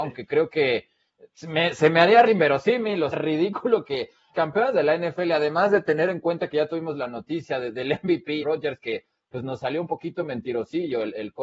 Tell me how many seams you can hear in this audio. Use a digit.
4